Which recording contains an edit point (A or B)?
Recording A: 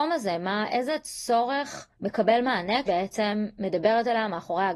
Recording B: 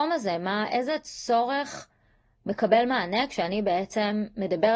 A